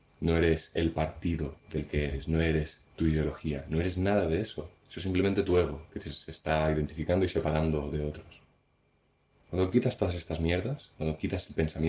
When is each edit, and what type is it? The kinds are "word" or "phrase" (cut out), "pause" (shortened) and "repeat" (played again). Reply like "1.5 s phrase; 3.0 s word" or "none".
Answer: 1.6 s pause; 2.8 s pause; 4.8 s pause